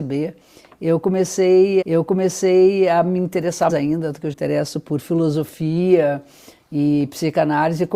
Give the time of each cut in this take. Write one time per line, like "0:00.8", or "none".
0:01.8
0:03.7
0:04.3